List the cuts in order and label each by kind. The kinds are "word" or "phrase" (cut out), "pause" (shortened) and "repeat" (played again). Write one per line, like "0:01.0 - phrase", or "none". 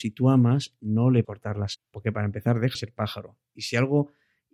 0:01.2 - word
0:01.7 - word
0:02.7 - word